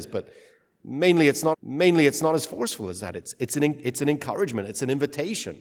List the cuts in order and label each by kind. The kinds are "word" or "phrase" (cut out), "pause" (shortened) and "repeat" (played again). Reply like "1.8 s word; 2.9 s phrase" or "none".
1.5 s repeat